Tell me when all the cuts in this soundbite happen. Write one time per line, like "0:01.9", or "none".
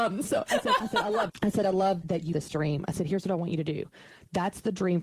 0:01.3
0:02.0
0:02.3